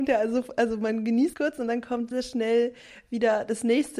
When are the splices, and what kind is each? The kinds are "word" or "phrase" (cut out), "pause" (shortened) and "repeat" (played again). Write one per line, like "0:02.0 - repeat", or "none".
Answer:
0:01.3 - word
0:02.1 - word